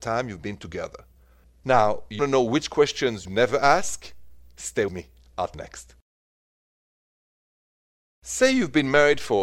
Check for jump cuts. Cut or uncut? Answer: cut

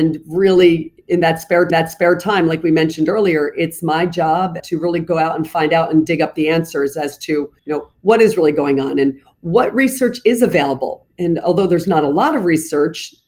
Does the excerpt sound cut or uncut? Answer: cut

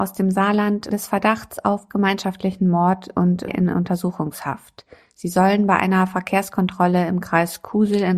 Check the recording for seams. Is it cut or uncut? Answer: cut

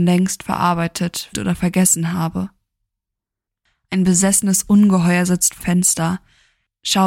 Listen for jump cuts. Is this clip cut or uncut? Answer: cut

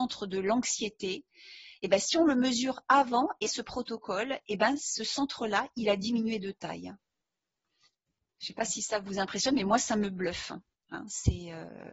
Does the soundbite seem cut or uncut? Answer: cut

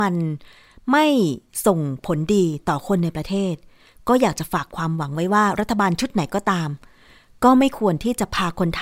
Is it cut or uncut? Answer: uncut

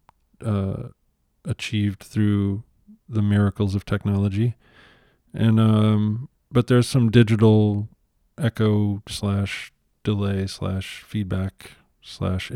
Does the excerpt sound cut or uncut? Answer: uncut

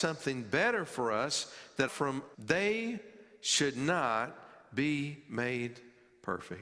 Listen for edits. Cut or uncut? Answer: cut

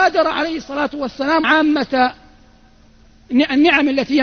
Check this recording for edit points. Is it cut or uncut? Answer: cut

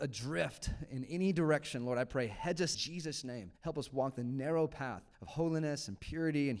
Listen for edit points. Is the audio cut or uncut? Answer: cut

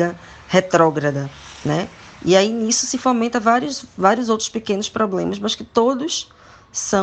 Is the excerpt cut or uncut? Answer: uncut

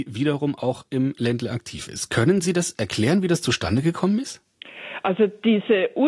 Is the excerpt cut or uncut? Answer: uncut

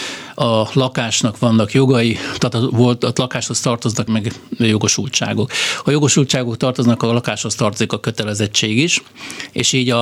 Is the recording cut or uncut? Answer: cut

